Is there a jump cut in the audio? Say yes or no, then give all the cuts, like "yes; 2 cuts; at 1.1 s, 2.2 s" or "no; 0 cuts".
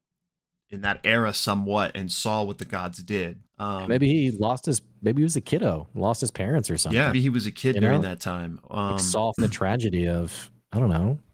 yes; 3 cuts; at 3.5 s, 7.1 s, 9.4 s